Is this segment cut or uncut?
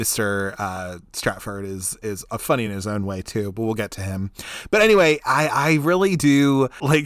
uncut